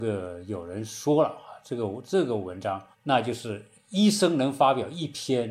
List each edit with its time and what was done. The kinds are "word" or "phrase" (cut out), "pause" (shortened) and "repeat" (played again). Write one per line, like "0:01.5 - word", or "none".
0:02.9 - pause

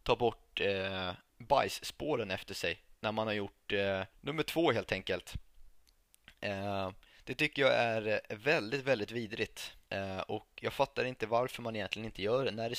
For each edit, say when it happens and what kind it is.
0:01.3 - pause
0:04.1 - pause
0:07.1 - pause
0:09.8 - pause

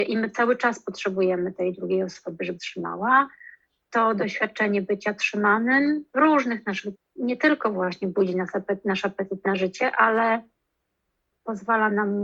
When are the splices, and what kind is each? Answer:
0:02.6 - word
0:06.9 - word

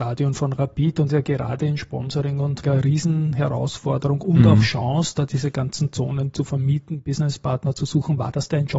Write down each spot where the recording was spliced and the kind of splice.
0:01.1 - phrase
0:02.6 - word

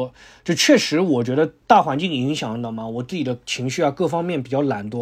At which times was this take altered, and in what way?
0:01.6 - pause

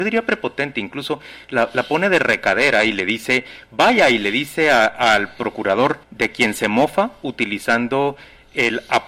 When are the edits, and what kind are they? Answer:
0:06.0 - pause

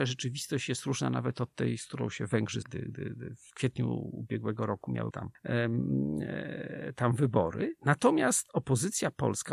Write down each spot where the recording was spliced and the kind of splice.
0:02.6 - word
0:05.1 - word

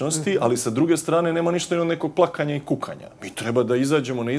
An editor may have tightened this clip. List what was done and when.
none

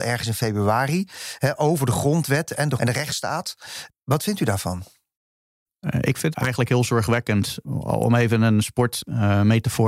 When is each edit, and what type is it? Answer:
0:02.8 - word
0:06.3 - word

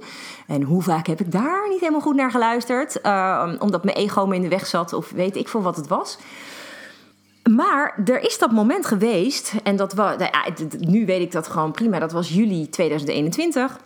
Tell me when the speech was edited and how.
0:07.1 - pause

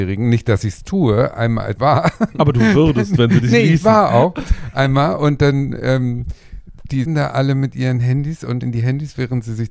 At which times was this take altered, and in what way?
0:01.3 - word
0:01.8 - word
0:07.1 - word
0:08.6 - word

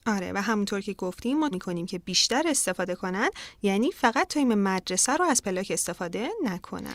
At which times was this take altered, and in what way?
0:01.5 - word

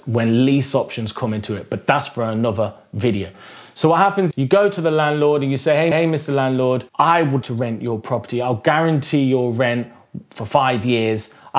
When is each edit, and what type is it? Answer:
0:04.3 - word
0:05.9 - repeat
0:06.9 - pause
0:07.4 - word

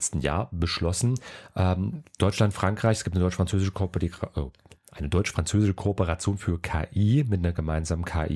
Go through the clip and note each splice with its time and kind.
none

